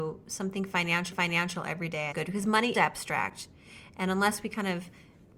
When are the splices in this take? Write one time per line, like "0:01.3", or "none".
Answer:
0:01.1
0:02.1
0:02.7